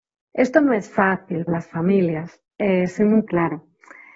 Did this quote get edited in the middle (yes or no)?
yes